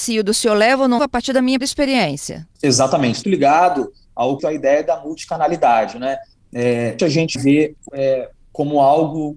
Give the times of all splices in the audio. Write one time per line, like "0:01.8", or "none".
0:01.0
0:01.6
0:03.2
0:04.4
0:07.0
0:07.4
0:07.9